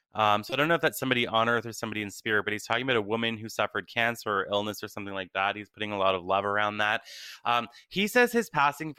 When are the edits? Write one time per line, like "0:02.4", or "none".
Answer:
none